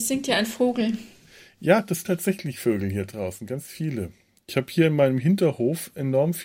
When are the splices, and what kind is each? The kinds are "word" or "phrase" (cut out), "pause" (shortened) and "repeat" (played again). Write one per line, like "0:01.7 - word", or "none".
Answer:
0:02.0 - word